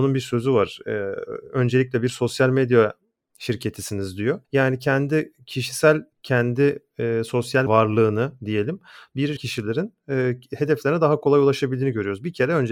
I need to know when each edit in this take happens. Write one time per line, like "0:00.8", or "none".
0:04.4
0:06.1
0:07.7
0:09.4